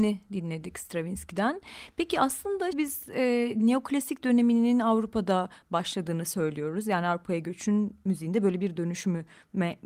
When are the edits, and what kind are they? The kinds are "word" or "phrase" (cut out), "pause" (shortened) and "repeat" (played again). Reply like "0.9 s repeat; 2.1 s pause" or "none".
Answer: 2.7 s word

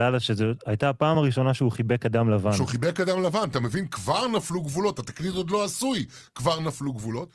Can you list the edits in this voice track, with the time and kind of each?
none

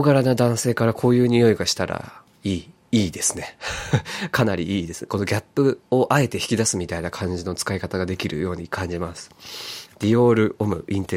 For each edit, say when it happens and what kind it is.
5.8 s pause

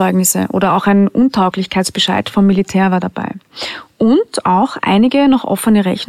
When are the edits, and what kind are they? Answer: none

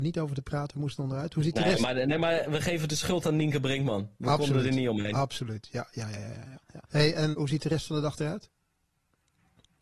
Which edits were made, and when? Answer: 6.9 s pause; 7.3 s word

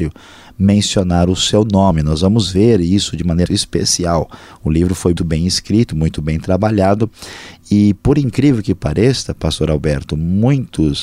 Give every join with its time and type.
3.5 s word; 5.2 s word

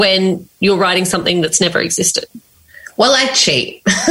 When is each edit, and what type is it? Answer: none

